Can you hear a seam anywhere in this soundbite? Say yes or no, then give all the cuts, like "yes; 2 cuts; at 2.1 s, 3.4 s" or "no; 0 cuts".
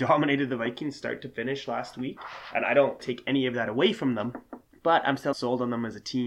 yes; 3 cuts; at 3.0 s, 4.7 s, 5.3 s